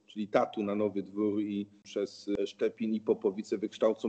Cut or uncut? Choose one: uncut